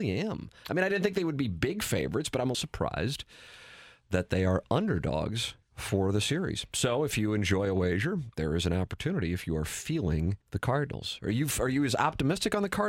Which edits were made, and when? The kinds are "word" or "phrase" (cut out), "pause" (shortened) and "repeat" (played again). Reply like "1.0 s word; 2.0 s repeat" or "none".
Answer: 2.5 s word; 5.6 s pause; 10.4 s pause